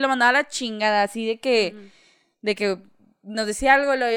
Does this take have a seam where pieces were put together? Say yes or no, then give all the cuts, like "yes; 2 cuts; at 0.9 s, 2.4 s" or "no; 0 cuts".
no; 0 cuts